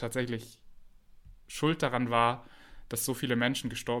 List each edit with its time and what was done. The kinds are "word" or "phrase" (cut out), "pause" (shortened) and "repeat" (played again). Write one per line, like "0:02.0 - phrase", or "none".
none